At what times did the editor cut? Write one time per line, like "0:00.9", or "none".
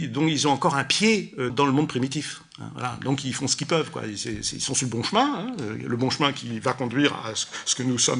0:01.5